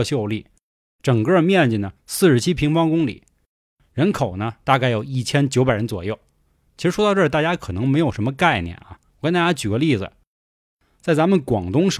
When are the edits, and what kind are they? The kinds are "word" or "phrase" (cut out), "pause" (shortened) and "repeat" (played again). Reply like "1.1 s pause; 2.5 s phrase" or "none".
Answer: 2.0 s pause; 9.1 s pause